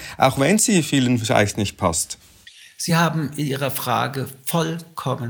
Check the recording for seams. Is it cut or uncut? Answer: uncut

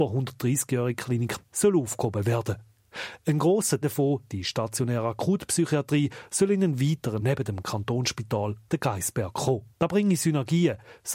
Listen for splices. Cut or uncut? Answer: cut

